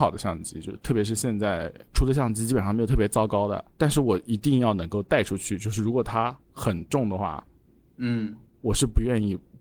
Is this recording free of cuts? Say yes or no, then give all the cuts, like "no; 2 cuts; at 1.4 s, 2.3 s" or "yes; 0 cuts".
yes; 0 cuts